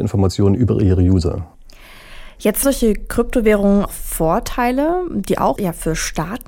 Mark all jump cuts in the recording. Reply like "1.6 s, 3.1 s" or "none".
2.6 s, 3.9 s, 5.6 s